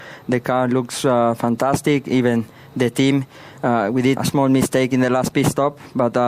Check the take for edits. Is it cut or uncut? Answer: cut